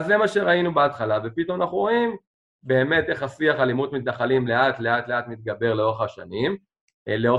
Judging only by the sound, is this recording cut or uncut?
uncut